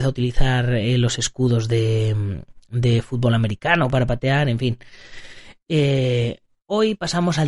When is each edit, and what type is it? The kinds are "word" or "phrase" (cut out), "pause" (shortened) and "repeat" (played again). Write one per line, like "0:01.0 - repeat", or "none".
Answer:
none